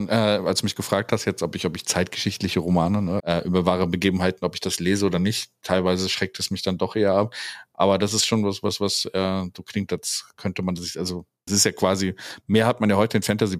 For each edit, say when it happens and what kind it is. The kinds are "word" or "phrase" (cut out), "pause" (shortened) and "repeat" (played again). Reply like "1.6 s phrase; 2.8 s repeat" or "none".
3.2 s word; 11.5 s word